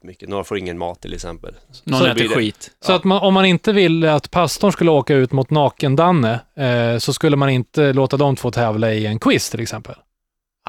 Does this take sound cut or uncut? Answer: uncut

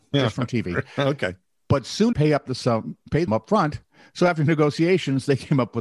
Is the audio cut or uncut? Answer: cut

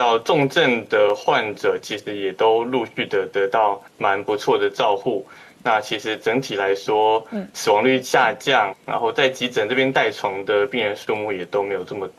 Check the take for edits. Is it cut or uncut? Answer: cut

